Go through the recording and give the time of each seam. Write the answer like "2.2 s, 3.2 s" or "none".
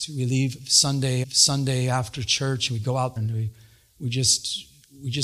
1.2 s, 3.2 s